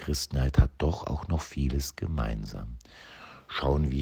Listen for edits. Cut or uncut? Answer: uncut